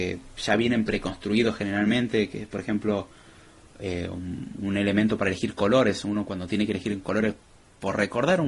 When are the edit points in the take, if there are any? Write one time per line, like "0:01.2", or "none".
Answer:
none